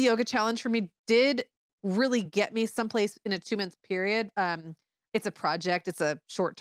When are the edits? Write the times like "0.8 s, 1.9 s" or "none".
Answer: none